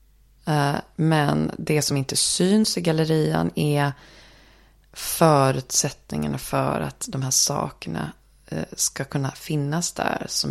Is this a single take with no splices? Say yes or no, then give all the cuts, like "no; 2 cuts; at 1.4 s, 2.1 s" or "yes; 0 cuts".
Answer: yes; 0 cuts